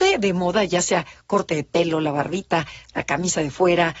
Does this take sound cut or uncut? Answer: uncut